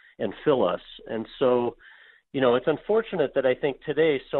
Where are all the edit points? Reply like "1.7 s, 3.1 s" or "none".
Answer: none